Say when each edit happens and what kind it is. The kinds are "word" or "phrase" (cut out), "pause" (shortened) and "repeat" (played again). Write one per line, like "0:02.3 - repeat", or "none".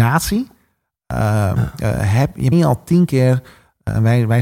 0:02.5 - word